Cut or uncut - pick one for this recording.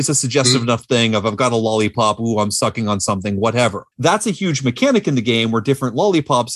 cut